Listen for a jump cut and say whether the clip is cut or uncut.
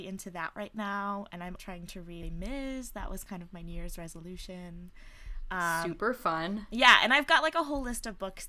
cut